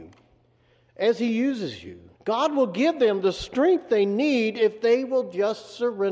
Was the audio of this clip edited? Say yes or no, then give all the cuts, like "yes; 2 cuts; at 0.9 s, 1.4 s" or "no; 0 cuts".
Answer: yes; 1 cut; at 2.2 s